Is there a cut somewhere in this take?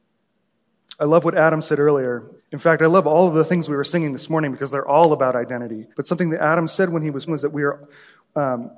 yes; 3 cuts; at 2.4 s, 5.9 s, 7.3 s

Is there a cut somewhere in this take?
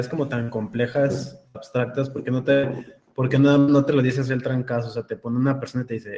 no; 0 cuts

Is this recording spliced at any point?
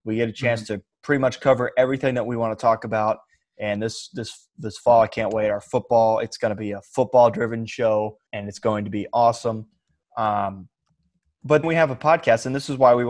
yes; 2 cuts; at 8.3 s, 11.6 s

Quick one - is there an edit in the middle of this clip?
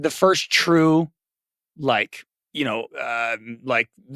yes; 2 cuts; at 2.3 s, 2.9 s

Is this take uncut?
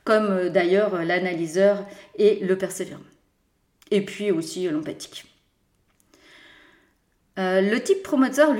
yes; 0 cuts

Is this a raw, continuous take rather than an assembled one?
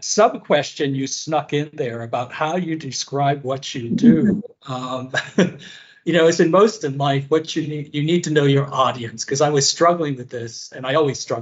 no; 1 cut; at 6.8 s

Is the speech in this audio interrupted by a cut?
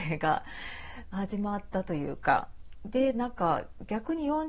no; 0 cuts

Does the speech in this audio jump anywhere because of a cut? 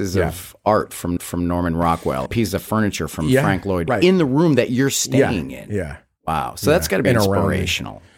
yes; 4 cuts; at 1.2 s, 2.3 s, 3.9 s, 7.0 s

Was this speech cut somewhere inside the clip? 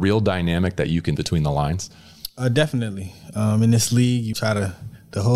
yes; 2 cuts; at 1.2 s, 4.3 s

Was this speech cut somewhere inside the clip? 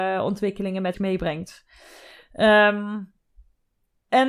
yes; 1 cut; at 0.9 s

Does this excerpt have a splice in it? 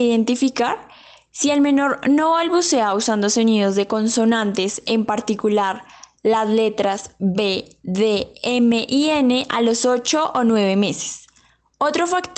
no; 0 cuts

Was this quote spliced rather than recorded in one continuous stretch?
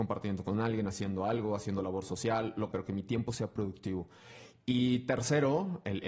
yes; 1 cut; at 2.7 s

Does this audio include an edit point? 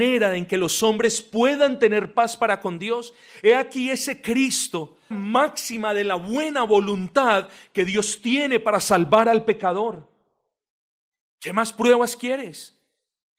yes; 1 cut; at 5.1 s

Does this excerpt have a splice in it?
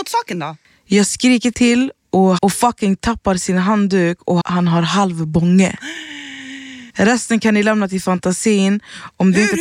yes; 3 cuts; at 2.4 s, 4.4 s, 6.9 s

